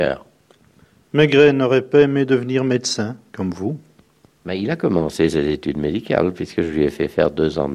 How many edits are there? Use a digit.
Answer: 0